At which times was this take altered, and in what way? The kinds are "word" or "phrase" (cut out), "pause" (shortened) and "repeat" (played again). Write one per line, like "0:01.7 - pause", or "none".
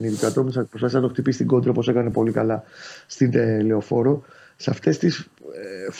none